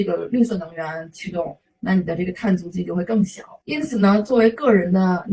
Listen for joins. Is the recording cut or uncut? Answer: cut